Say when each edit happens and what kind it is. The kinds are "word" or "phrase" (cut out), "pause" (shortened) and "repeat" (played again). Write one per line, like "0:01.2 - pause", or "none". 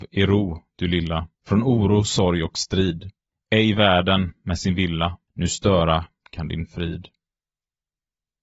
0:01.4 - pause
0:03.3 - pause
0:05.3 - pause